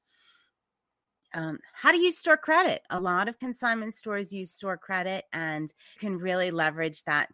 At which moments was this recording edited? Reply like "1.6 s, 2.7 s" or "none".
6.0 s